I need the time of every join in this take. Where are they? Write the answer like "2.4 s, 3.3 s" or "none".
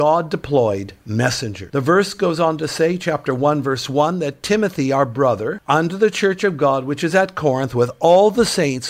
none